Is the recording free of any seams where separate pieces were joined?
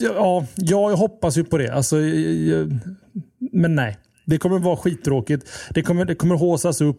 yes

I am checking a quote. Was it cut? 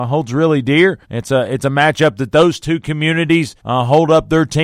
yes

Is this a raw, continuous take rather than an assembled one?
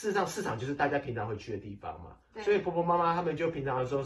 yes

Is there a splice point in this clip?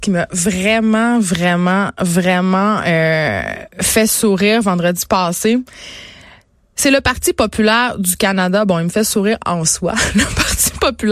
no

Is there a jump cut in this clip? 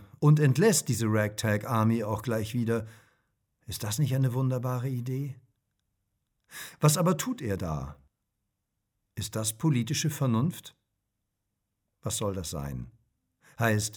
no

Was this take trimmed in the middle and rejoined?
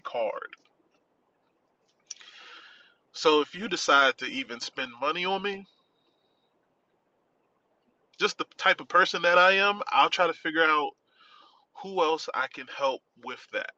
no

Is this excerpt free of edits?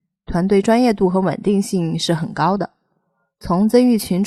yes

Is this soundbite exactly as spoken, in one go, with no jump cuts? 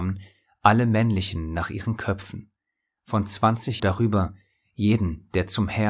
no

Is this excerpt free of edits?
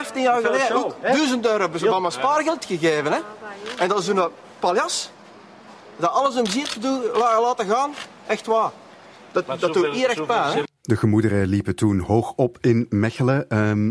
yes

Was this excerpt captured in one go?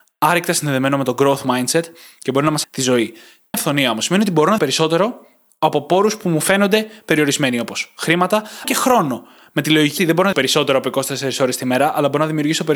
no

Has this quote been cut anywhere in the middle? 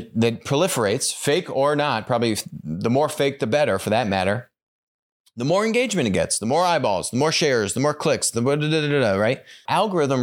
no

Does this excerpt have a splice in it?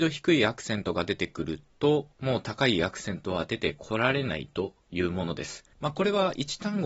yes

